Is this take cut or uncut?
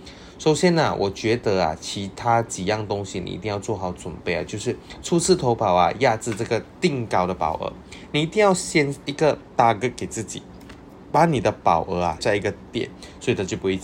cut